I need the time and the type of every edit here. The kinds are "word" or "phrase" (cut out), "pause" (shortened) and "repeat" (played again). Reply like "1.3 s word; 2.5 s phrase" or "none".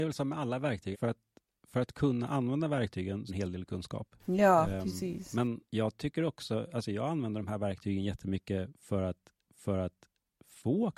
0.9 s word; 3.3 s phrase; 4.2 s pause; 5.6 s pause; 9.5 s repeat